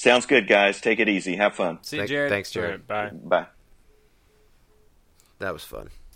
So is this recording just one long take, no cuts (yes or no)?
yes